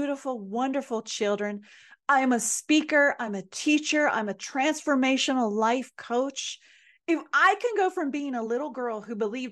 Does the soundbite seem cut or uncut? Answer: uncut